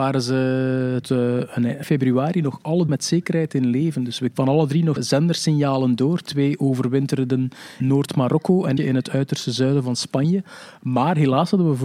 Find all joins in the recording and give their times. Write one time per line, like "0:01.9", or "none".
0:01.0
0:01.8
0:02.9
0:04.3
0:05.0
0:07.8
0:08.8